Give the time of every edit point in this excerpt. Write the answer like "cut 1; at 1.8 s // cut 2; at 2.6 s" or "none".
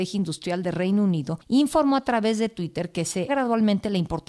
cut 1; at 3.3 s